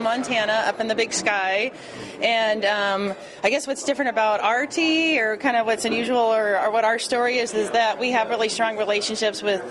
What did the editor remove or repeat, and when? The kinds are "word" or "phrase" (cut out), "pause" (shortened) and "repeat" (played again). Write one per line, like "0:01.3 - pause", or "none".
none